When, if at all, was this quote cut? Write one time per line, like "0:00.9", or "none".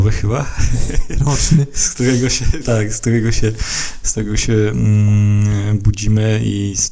0:02.6